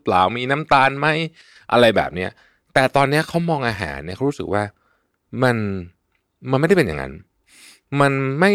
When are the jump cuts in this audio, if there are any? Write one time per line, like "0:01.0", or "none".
none